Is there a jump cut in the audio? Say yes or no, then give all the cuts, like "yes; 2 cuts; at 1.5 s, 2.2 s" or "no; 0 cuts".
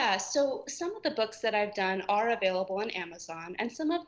no; 0 cuts